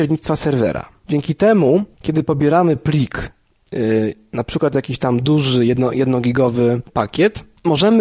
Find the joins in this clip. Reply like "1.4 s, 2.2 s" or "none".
1.9 s